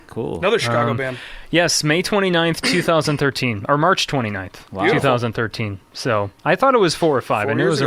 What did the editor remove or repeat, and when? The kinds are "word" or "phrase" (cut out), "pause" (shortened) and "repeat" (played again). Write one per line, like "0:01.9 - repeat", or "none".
0:04.7 - pause

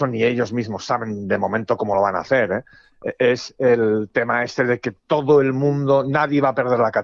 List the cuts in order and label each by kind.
none

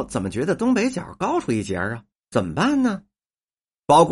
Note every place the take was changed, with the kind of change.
0:02.1 - pause

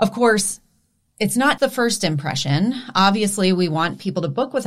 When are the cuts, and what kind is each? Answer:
0:01.6 - word

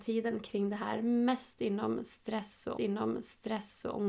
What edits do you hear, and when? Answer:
0:02.7 - repeat

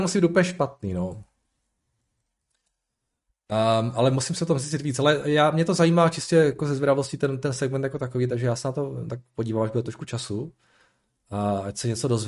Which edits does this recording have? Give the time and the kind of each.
none

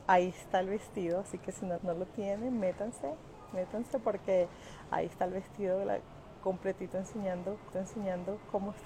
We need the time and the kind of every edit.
0:01.8 - word
0:07.7 - repeat

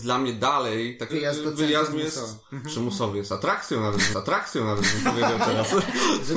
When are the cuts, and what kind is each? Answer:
0:01.1 - phrase
0:01.9 - phrase
0:04.1 - repeat

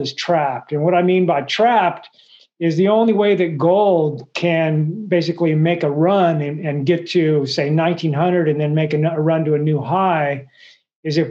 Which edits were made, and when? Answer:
none

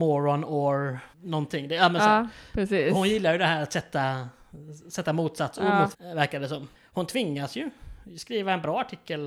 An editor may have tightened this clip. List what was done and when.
0:01.1 - pause
0:05.9 - word
0:06.7 - pause

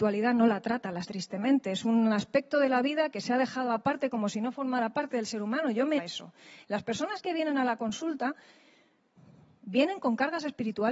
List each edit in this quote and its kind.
0:01.0 - word
0:06.0 - word

